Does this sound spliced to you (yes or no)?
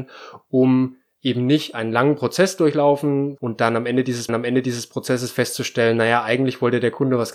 yes